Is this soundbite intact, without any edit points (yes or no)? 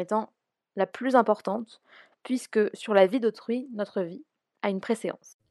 yes